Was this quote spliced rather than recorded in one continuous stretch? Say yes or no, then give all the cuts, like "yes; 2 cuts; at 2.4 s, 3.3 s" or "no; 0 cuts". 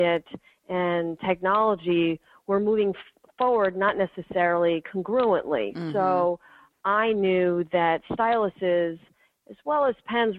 no; 0 cuts